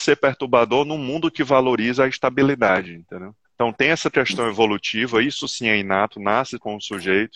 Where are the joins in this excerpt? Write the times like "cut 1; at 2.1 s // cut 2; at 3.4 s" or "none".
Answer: cut 1; at 3.4 s